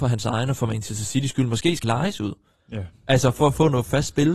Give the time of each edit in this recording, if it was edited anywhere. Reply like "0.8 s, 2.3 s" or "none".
1.8 s